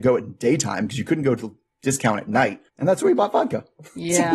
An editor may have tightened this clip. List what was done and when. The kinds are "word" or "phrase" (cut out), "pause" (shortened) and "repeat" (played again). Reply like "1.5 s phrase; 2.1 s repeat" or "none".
2.7 s pause